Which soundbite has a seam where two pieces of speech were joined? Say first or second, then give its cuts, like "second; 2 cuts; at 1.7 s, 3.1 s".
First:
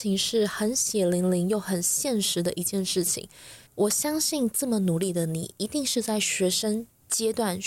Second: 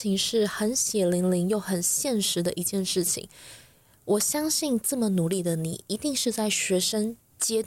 first; 1 cut; at 3.7 s